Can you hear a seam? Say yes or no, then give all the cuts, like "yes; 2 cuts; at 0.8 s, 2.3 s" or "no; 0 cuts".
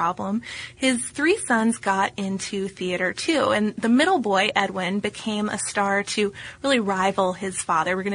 no; 0 cuts